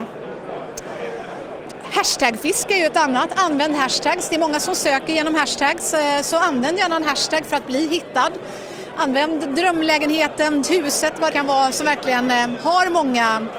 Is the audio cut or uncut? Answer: cut